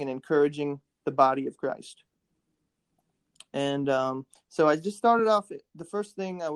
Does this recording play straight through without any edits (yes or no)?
yes